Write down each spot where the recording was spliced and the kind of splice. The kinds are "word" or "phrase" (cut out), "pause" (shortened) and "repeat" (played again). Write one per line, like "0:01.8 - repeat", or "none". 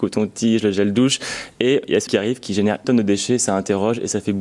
0:02.1 - word
0:02.8 - word